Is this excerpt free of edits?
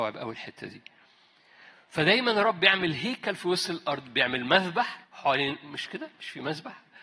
no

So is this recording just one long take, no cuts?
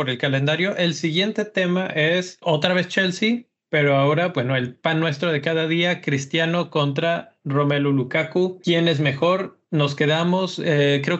yes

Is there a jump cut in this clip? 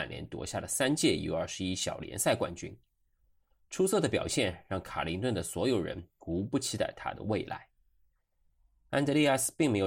no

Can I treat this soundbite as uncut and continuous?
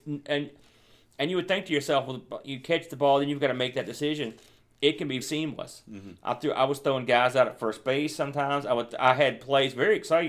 no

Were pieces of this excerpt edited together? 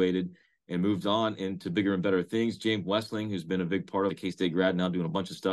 yes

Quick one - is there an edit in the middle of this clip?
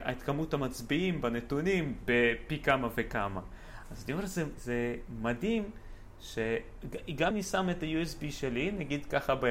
yes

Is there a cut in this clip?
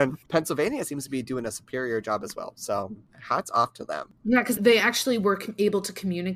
no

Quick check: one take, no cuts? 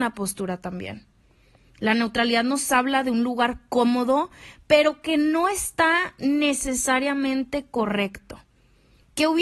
yes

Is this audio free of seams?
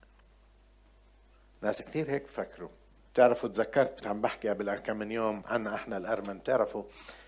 no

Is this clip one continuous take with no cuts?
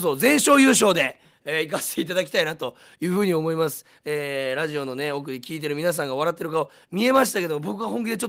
yes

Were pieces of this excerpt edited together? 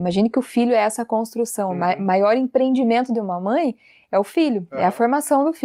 no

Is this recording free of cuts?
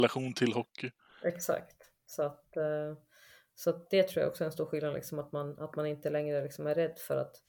yes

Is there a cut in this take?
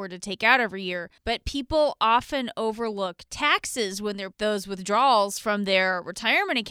yes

